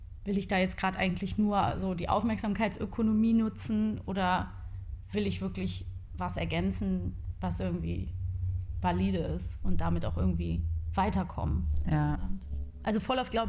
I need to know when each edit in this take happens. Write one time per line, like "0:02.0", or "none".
none